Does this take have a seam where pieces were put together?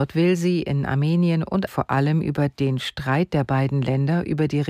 yes; 1 cut; at 1.7 s

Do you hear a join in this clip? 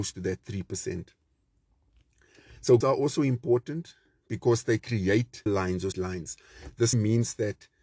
yes; 4 cuts; at 2.8 s, 5.5 s, 5.9 s, 6.9 s

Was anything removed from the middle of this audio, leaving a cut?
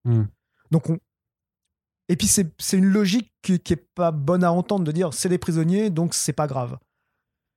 no; 0 cuts

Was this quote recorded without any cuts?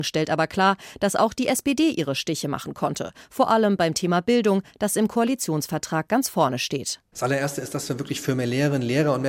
yes; 0 cuts

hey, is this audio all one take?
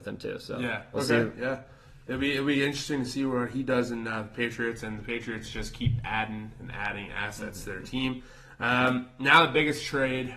yes; 0 cuts

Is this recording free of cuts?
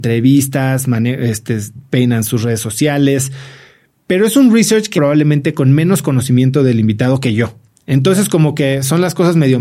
no; 1 cut; at 5.0 s

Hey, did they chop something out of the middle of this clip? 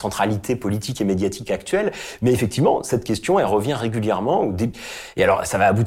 no; 0 cuts

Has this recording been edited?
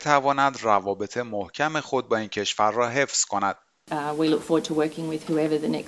no; 0 cuts

